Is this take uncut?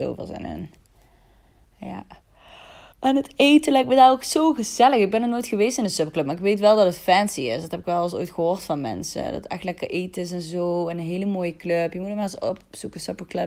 no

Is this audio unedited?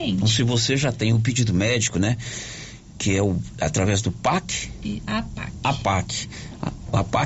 yes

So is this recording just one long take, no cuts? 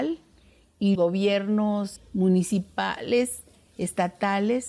no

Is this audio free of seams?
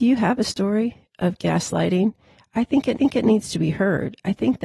no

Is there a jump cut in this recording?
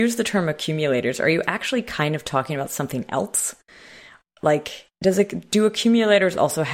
yes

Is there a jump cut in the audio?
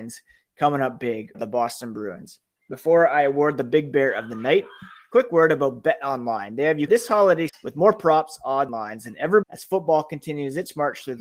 yes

